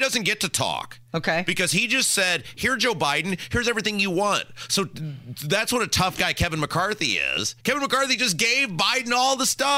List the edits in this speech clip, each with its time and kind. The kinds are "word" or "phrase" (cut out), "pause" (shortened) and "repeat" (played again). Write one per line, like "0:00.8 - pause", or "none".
0:07.6 - pause